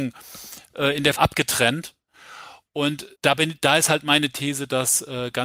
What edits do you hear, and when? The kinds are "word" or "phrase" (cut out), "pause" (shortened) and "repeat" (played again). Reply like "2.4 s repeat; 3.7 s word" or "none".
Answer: 1.2 s word; 3.2 s pause